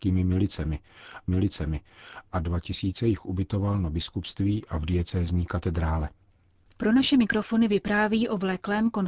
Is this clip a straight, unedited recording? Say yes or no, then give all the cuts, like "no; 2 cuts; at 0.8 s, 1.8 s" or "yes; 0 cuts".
no; 1 cut; at 1.3 s